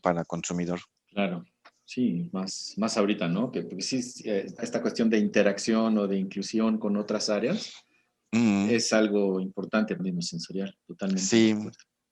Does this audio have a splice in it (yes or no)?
yes